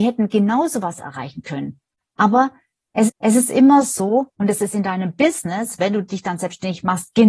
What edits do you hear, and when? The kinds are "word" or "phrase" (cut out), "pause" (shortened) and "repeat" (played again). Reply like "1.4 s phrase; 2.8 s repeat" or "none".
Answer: 3.1 s repeat; 4.3 s pause